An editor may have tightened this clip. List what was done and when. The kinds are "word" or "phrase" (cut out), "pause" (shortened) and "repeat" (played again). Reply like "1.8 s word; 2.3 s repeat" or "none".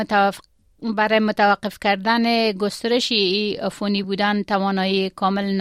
none